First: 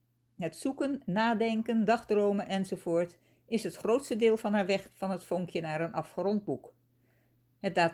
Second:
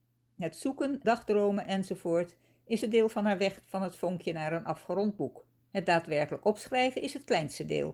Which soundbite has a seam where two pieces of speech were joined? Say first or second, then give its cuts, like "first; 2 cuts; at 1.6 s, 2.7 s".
second; 3 cuts; at 1.0 s, 2.8 s, 5.6 s